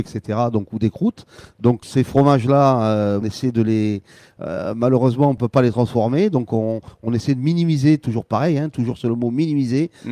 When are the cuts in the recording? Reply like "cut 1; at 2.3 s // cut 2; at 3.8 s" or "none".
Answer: cut 1; at 1.8 s // cut 2; at 3.2 s